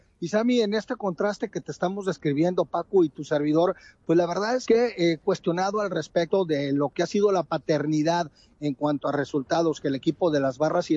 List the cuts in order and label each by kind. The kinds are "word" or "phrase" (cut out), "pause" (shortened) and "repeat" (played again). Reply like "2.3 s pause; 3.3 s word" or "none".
none